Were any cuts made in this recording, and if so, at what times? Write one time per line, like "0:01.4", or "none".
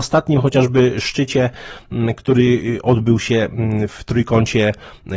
0:03.9

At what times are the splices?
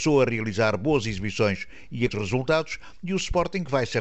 0:02.1

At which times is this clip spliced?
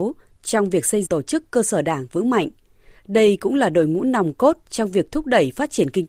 0:01.1

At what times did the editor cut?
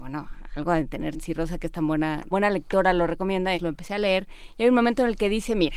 0:01.1
0:02.3
0:03.5

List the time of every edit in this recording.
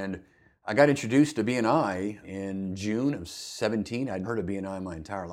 0:02.2
0:04.2

